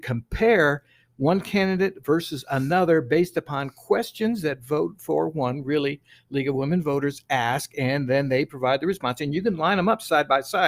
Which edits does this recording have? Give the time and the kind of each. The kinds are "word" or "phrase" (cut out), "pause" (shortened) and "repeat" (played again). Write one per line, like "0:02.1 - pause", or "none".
none